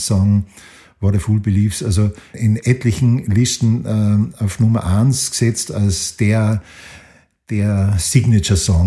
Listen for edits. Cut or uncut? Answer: uncut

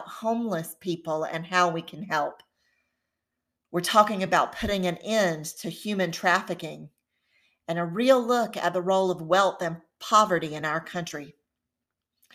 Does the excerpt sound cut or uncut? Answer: uncut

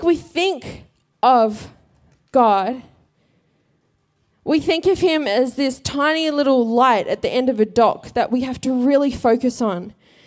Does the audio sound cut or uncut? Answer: uncut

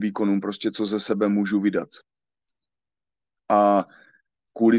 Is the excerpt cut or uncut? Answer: uncut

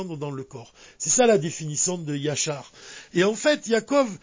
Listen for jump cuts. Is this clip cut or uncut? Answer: uncut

